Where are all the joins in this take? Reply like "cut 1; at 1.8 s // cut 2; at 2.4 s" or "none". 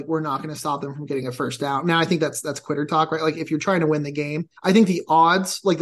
cut 1; at 4.6 s